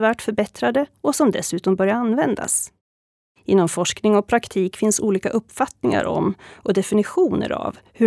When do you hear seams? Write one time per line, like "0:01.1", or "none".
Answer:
none